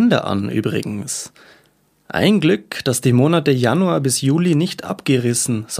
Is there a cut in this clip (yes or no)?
no